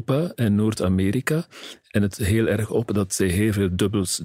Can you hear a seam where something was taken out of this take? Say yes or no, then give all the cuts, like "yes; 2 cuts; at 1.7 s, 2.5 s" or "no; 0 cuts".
yes; 1 cut; at 2.1 s